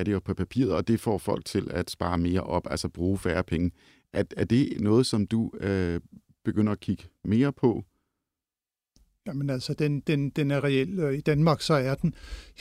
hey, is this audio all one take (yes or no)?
yes